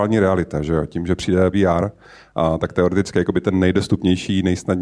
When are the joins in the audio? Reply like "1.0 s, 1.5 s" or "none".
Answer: 1.5 s